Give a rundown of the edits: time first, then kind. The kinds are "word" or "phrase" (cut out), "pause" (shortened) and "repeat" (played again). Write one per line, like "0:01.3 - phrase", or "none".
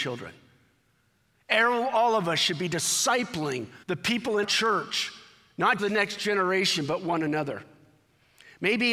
0:03.8 - pause
0:04.4 - word
0:05.8 - word